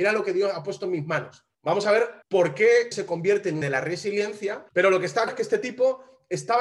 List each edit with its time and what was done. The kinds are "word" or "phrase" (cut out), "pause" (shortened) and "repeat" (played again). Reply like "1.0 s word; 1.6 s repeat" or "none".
1.5 s pause; 2.2 s pause; 2.9 s word; 3.6 s word; 4.7 s pause; 5.3 s word